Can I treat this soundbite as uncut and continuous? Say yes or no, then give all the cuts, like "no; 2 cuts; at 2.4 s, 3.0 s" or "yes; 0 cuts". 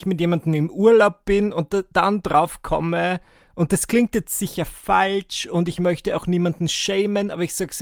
yes; 0 cuts